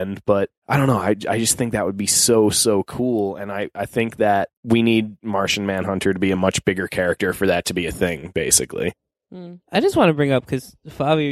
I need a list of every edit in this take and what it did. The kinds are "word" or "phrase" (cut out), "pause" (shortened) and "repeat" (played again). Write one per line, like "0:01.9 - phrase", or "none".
0:04.6 - pause